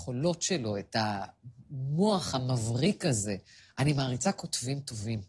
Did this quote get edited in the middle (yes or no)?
yes